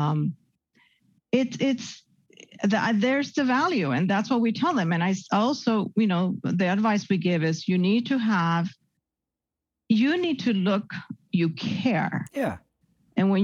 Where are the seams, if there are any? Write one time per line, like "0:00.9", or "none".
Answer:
0:11.3